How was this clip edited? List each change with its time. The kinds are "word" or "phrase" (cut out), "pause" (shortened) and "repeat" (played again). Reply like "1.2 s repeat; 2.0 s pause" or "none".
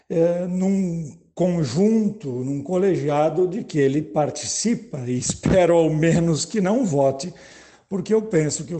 none